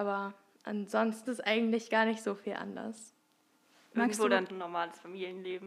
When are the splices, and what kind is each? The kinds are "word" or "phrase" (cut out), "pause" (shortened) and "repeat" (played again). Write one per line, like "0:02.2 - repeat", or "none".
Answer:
0:01.3 - word
0:04.5 - word